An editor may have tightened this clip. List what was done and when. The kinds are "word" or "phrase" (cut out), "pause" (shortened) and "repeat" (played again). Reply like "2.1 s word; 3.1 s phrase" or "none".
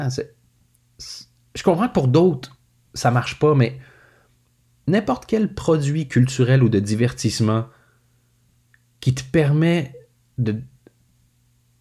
none